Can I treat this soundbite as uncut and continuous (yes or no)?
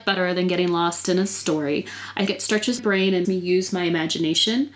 no